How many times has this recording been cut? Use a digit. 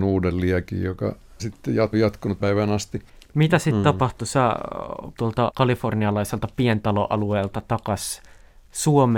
5